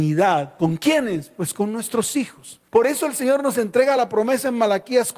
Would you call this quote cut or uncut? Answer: uncut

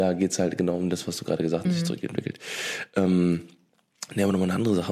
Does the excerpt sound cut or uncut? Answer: cut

